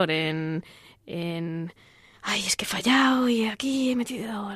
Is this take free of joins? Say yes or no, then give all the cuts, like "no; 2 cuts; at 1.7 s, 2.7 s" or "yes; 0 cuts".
yes; 0 cuts